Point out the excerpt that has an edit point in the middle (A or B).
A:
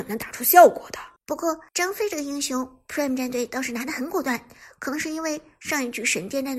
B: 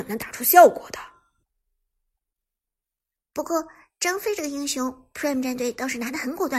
A